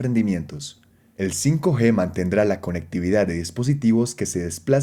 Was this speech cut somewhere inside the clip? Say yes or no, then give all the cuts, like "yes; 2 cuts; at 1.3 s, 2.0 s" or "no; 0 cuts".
no; 0 cuts